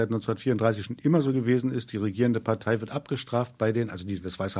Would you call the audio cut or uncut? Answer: uncut